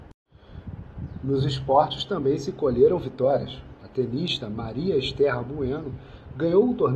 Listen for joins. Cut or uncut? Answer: uncut